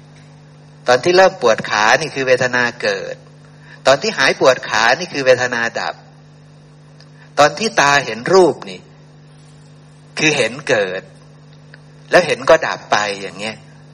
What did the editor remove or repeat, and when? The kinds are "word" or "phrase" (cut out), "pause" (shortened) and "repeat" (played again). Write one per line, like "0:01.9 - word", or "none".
none

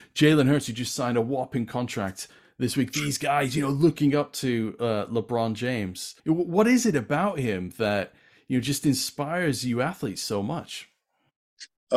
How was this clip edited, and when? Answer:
0:06.2 - pause

